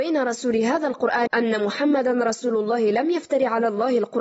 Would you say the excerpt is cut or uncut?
cut